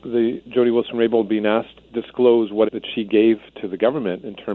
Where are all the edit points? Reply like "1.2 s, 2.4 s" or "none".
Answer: 1.8 s, 2.7 s

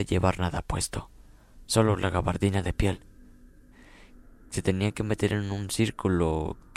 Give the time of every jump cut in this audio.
none

